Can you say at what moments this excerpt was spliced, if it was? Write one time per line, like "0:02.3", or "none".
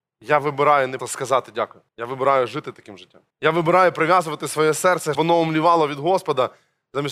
0:01.0
0:01.9
0:03.3
0:05.1